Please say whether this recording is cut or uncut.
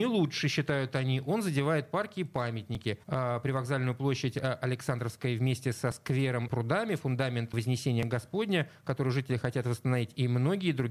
cut